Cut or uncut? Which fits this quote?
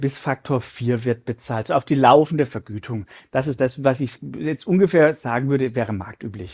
uncut